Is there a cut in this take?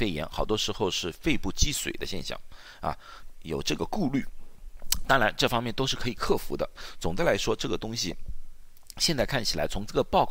no; 0 cuts

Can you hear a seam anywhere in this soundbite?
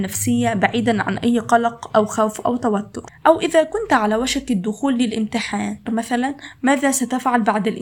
yes; 1 cut; at 5.9 s

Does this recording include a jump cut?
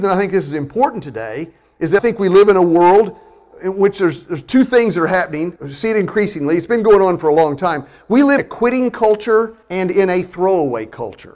yes; 4 cuts; at 2.0 s, 5.6 s, 8.4 s, 9.6 s

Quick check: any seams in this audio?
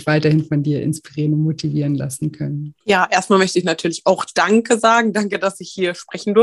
yes; 1 cut; at 2.8 s

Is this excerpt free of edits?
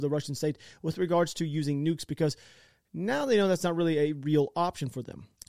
yes; 0 cuts

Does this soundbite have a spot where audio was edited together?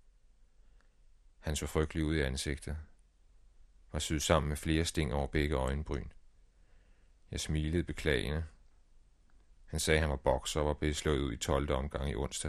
no; 0 cuts

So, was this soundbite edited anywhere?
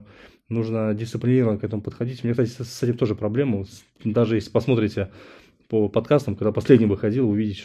no; 0 cuts

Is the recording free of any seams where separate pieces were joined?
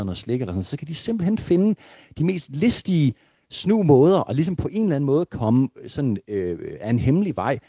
yes; 0 cuts

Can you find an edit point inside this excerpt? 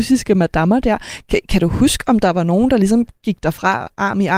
no; 0 cuts

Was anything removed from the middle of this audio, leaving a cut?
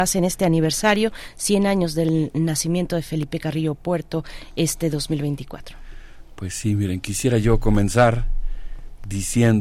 no; 0 cuts

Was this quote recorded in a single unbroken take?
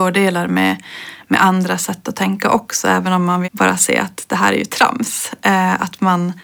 no; 1 cut; at 3.4 s

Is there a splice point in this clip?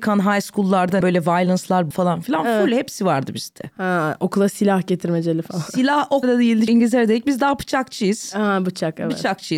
yes; 4 cuts; at 1.0 s, 1.9 s, 6.2 s, 6.7 s

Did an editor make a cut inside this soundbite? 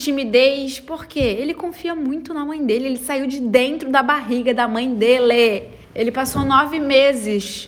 yes; 1 cut; at 5.8 s

